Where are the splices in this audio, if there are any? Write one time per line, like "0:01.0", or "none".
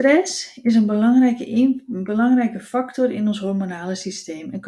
none